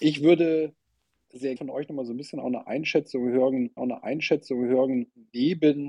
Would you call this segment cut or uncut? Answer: cut